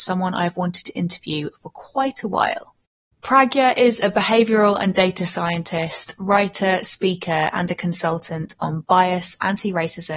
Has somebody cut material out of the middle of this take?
no; 0 cuts

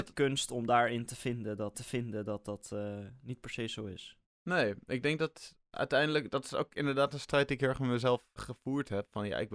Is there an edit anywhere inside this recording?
yes; 2 cuts; at 1.7 s, 8.4 s

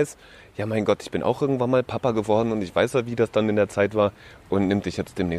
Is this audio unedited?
yes; 0 cuts

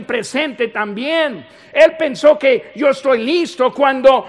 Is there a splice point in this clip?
no; 0 cuts

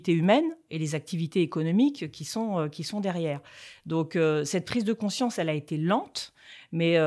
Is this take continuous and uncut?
yes; 0 cuts

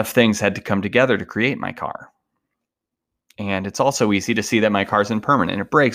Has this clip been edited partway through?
no; 0 cuts

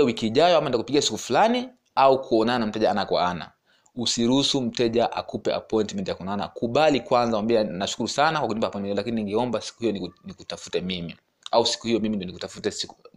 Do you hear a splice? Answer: no; 0 cuts

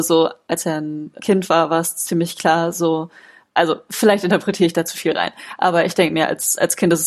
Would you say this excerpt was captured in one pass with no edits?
yes; 0 cuts

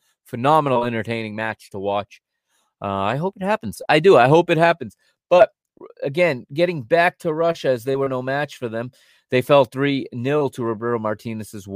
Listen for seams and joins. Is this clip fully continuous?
yes; 0 cuts

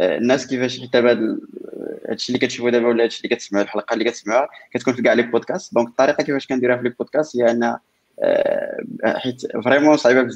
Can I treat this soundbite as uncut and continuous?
yes; 0 cuts

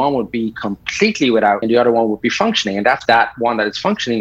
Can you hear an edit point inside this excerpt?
yes; 2 cuts; at 1.6 s, 3.1 s

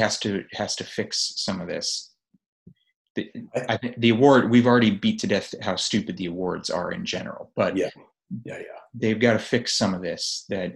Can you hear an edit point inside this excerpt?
no; 0 cuts

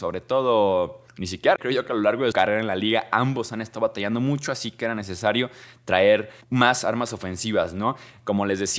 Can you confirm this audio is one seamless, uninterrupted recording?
no; 4 cuts; at 1.1 s, 1.6 s, 2.3 s, 6.4 s

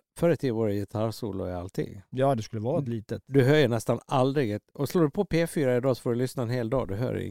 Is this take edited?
no; 0 cuts

